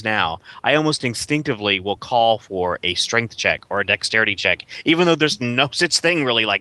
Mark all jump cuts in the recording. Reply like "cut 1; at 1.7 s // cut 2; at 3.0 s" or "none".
none